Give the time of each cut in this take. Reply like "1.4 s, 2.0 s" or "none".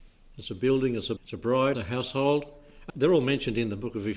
1.2 s, 1.7 s, 2.9 s